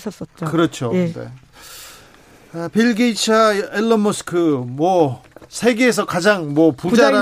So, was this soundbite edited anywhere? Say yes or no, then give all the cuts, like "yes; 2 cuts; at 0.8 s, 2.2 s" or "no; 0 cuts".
no; 0 cuts